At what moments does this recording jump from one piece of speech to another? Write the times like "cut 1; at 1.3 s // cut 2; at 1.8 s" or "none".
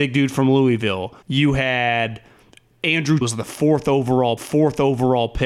cut 1; at 1.2 s // cut 2; at 3.2 s // cut 3; at 4.4 s